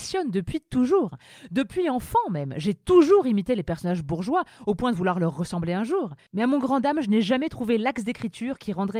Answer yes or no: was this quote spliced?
no